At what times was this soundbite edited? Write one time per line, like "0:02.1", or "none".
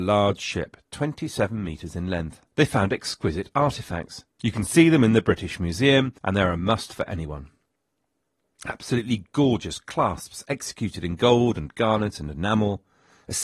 0:02.5
0:04.3
0:06.2